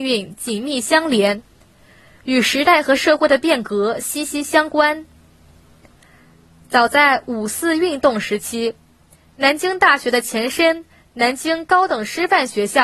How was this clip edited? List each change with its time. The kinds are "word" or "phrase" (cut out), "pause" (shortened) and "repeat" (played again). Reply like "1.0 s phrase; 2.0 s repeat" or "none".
none